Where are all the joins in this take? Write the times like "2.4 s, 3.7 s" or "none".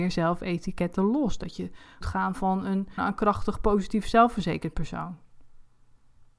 2.0 s, 3.0 s